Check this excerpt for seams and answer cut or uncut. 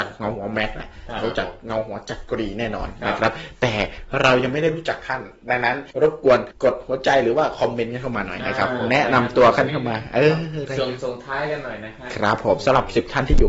cut